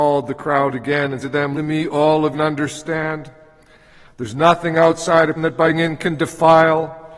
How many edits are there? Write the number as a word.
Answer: five